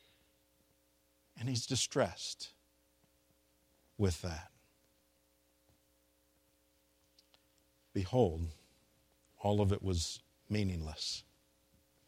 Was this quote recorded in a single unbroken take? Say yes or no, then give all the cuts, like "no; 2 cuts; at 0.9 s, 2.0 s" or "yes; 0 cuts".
yes; 0 cuts